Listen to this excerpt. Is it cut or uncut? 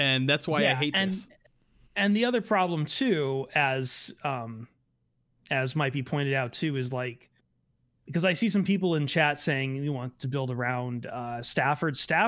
uncut